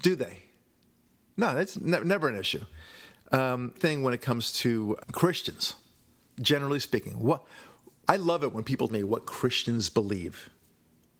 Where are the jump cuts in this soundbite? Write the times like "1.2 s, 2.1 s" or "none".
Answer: 1.7 s, 3.8 s, 5.0 s, 8.0 s, 8.9 s

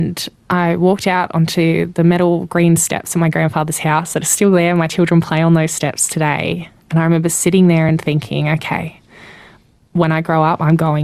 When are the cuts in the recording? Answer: none

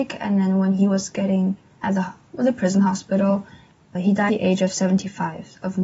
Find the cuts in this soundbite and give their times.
1.8 s, 3.9 s, 4.3 s

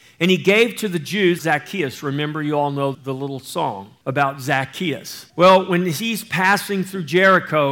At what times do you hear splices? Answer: 1.4 s, 2.9 s, 4.0 s, 5.3 s

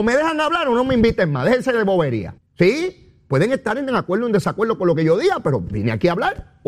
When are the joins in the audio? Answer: 2.4 s

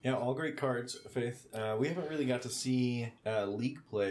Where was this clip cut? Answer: 3.2 s

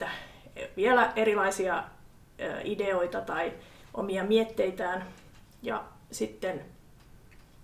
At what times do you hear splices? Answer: none

